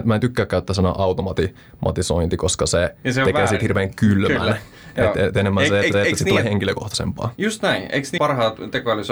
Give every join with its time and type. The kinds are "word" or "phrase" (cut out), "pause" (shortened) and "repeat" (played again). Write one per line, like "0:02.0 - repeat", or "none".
0:05.9 - repeat
0:08.2 - word